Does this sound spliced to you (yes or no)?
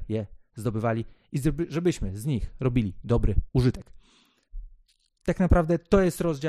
no